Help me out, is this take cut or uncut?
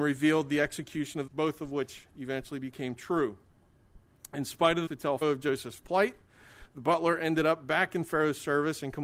cut